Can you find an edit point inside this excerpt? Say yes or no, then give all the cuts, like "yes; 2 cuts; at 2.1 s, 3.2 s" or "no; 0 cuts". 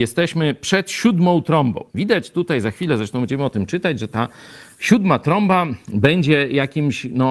yes; 2 cuts; at 1.9 s, 5.8 s